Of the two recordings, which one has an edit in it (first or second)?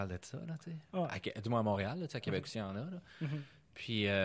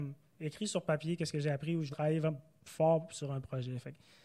second